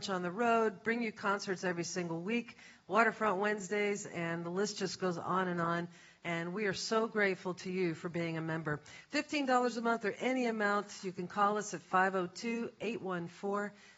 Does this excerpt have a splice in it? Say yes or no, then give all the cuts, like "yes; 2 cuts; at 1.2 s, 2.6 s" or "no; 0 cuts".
no; 0 cuts